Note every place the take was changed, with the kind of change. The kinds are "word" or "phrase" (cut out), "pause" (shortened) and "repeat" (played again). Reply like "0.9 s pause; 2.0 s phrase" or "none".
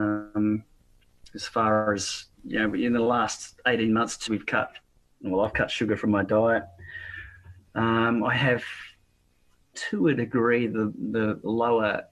2.3 s pause; 4.3 s word; 9.7 s word